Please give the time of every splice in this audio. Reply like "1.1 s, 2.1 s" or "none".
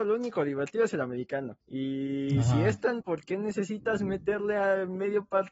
1.6 s, 3.0 s